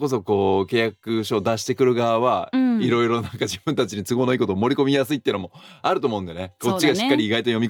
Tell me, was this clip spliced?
no; 0 cuts

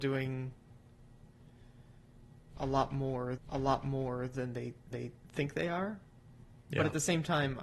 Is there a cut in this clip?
yes; 2 cuts; at 3.4 s, 4.9 s

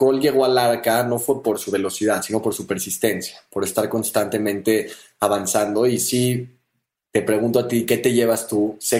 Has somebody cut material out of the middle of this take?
no; 0 cuts

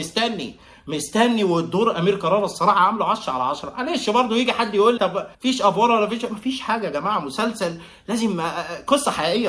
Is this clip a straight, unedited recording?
no; 2 cuts; at 5.0 s, 5.3 s

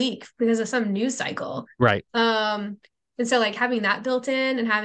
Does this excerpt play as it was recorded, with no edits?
yes; 0 cuts

